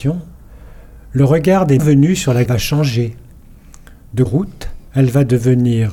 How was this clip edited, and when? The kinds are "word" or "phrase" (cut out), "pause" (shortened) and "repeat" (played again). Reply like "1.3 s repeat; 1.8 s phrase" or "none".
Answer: 1.8 s word; 2.5 s word; 4.3 s phrase; 4.9 s pause